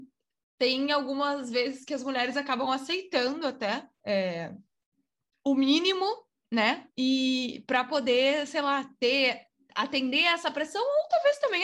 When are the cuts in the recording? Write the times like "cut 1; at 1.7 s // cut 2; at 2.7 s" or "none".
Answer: cut 1; at 3.9 s // cut 2; at 6.9 s